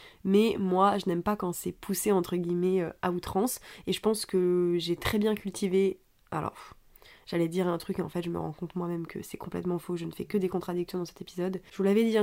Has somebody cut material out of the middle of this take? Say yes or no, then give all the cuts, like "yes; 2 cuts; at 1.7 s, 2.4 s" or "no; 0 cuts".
no; 0 cuts